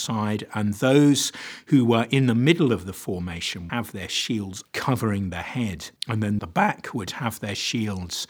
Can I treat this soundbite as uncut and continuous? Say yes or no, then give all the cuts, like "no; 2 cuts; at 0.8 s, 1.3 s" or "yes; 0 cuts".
no; 4 cuts; at 3.7 s, 4.6 s, 6.0 s, 6.4 s